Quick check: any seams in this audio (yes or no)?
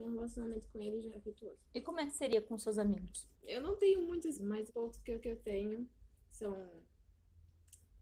yes